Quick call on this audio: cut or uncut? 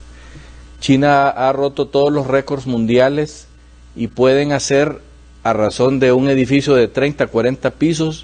uncut